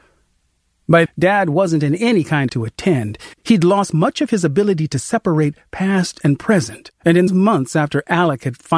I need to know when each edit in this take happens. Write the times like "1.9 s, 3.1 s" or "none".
1.1 s, 2.5 s, 3.3 s, 6.9 s, 7.3 s